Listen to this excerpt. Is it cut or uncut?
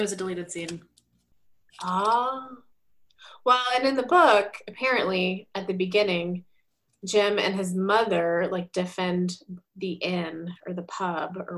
uncut